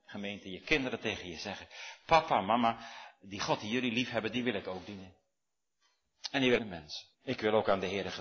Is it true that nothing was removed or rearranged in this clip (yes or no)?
no